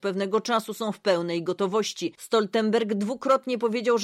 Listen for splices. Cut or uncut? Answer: uncut